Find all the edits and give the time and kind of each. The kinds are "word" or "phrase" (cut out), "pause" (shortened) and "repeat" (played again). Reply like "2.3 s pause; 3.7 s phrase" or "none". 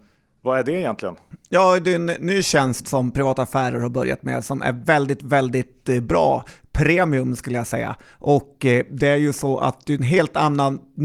none